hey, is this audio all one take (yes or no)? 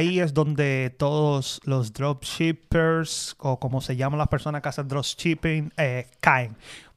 yes